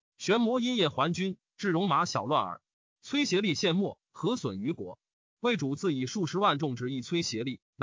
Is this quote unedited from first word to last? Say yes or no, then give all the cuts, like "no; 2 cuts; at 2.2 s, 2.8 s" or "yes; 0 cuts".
yes; 0 cuts